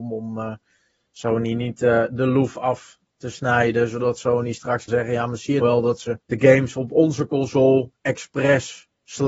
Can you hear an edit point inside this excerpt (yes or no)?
yes